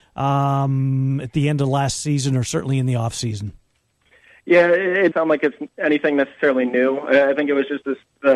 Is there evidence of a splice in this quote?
yes; 1 cut; at 5.1 s

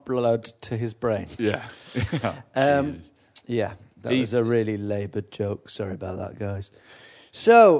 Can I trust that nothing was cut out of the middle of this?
yes; 0 cuts

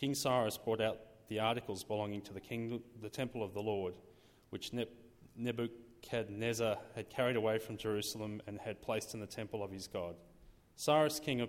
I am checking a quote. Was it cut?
no; 0 cuts

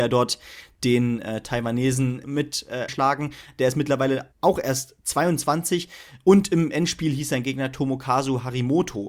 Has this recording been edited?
yes; 3 cuts; at 2.2 s, 2.9 s, 4.3 s

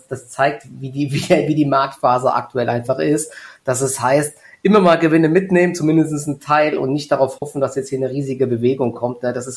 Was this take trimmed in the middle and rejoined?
no; 0 cuts

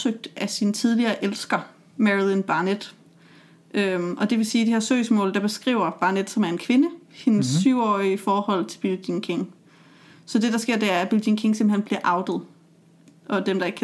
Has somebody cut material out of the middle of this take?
no; 0 cuts

